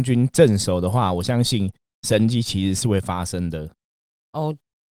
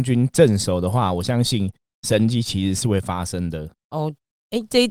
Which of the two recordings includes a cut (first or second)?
second